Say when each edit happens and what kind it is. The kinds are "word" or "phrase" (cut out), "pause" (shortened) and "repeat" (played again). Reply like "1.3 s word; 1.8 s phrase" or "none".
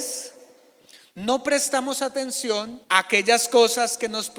2.8 s pause